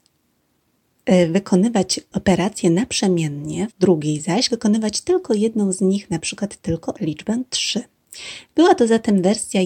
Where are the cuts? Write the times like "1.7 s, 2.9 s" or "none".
2.1 s, 3.7 s, 4.5 s, 6.9 s